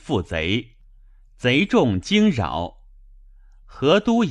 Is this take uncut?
yes; 0 cuts

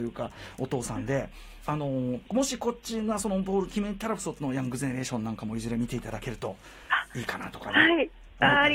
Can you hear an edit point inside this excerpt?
no; 0 cuts

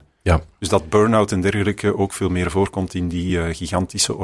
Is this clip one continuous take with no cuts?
yes; 0 cuts

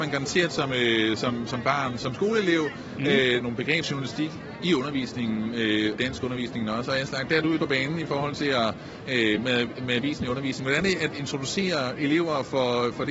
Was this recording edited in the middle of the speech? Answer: yes; 7 cuts; at 3.4 s, 3.8 s, 5.9 s, 7.6 s, 9.4 s, 10.8 s, 11.1 s

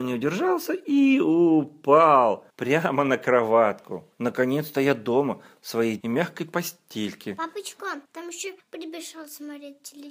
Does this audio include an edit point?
yes; 5 cuts; at 2.5 s, 4.1 s, 6.0 s, 8.0 s, 8.6 s

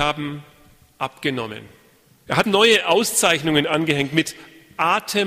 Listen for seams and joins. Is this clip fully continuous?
no; 1 cut; at 2.4 s

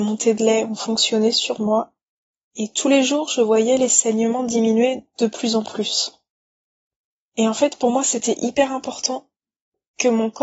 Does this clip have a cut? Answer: no; 0 cuts

